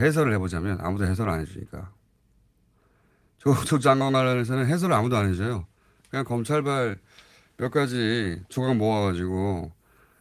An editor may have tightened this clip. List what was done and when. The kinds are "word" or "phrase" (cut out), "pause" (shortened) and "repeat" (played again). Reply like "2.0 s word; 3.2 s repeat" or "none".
none